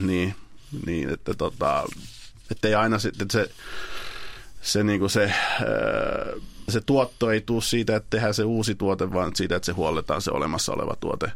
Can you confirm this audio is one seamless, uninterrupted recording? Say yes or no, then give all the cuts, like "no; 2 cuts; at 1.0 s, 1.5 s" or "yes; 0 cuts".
yes; 0 cuts